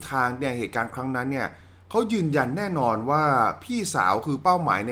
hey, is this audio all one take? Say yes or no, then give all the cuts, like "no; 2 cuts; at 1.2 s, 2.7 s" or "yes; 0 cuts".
yes; 0 cuts